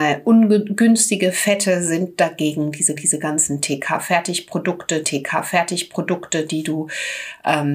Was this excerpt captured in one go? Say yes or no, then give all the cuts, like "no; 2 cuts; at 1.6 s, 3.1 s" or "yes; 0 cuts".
no; 2 cuts; at 3.0 s, 5.0 s